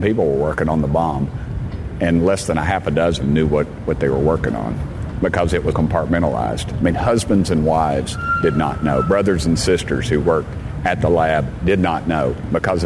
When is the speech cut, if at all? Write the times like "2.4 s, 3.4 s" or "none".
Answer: 5.7 s